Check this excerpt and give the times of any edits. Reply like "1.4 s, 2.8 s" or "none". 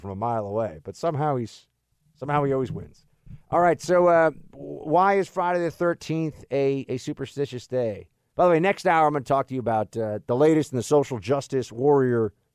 none